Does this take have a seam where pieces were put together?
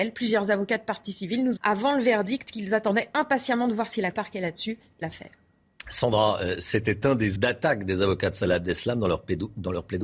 yes; 4 cuts; at 1.6 s, 4.1 s, 5.0 s, 7.4 s

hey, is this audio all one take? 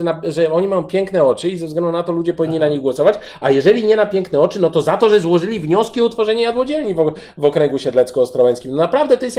yes; 0 cuts

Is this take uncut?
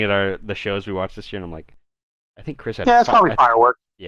yes; 0 cuts

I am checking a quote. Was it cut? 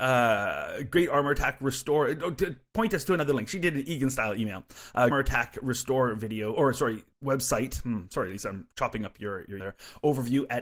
yes; 4 cuts; at 5.1 s, 7.1 s, 8.7 s, 9.6 s

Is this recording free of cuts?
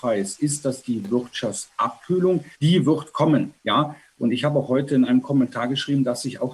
no; 2 cuts; at 2.5 s, 3.6 s

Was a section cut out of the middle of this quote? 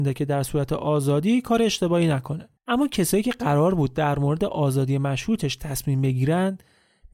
yes; 1 cut; at 2.6 s

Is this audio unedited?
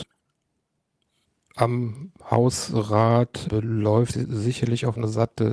no; 2 cuts; at 2.2 s, 4.1 s

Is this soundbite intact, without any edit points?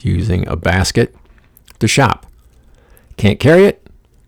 yes; 0 cuts

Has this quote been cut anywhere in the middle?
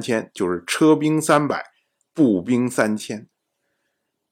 no; 0 cuts

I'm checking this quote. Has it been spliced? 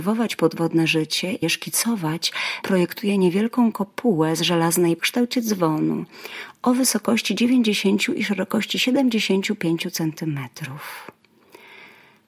yes; 3 cuts; at 1.4 s, 2.6 s, 5.0 s

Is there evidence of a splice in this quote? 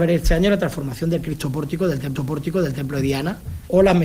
yes; 1 cut; at 2.2 s

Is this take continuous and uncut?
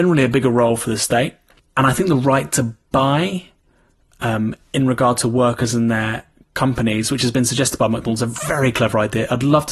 yes; 0 cuts

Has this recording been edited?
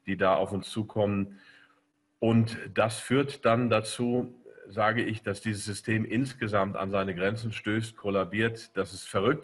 no; 0 cuts

